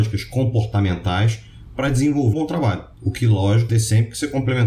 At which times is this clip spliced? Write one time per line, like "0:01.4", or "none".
0:02.3
0:02.9
0:03.7